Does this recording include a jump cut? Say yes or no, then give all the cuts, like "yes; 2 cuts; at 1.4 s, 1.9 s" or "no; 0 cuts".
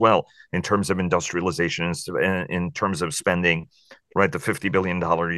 no; 0 cuts